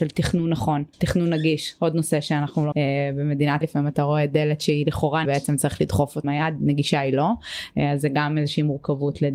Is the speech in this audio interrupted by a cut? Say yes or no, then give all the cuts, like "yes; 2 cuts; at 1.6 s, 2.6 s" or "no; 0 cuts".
yes; 5 cuts; at 0.9 s, 2.7 s, 3.6 s, 5.2 s, 6.2 s